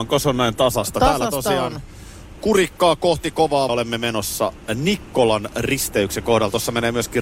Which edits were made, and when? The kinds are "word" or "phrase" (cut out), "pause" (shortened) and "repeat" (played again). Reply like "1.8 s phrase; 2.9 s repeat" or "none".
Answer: 3.7 s word